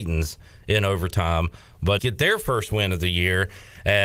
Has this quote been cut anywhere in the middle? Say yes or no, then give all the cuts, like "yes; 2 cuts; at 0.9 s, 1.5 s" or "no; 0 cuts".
yes; 1 cut; at 2.0 s